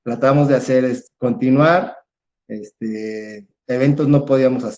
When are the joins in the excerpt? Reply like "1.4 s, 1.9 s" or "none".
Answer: none

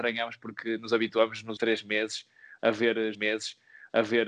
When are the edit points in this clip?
1.6 s, 3.1 s

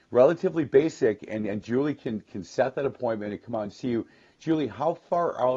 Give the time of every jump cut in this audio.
none

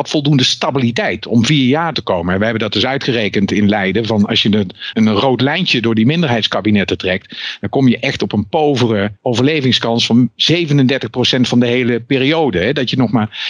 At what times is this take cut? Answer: 1.9 s, 4.9 s, 9.2 s

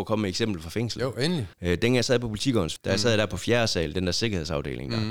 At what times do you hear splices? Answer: 1.5 s, 2.8 s

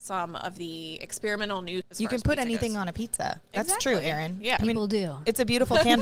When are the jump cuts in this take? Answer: 1.8 s, 4.6 s

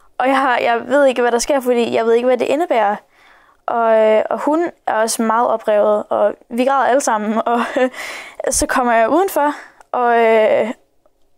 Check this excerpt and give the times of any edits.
none

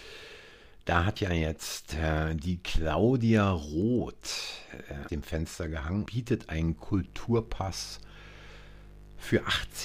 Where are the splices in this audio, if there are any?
1.2 s, 5.1 s, 6.1 s

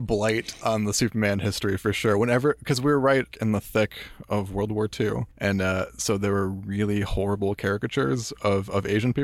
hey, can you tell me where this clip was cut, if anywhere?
3.3 s, 5.3 s

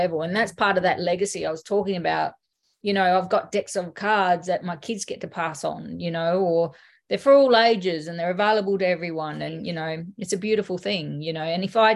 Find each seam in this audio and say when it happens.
none

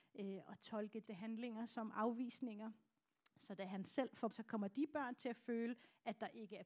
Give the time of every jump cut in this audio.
1.1 s, 4.3 s

